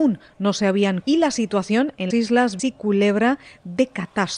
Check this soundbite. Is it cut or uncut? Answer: cut